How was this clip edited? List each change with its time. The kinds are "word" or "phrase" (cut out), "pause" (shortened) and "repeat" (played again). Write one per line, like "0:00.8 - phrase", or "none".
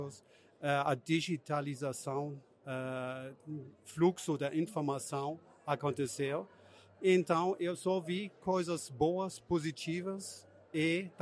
none